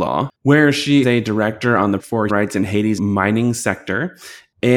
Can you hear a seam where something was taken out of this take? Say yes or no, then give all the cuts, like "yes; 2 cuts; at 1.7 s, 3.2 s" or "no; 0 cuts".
yes; 4 cuts; at 1.0 s, 2.0 s, 2.3 s, 3.0 s